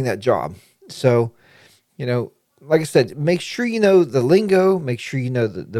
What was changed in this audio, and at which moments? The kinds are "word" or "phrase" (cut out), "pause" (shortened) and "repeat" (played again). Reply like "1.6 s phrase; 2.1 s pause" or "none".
none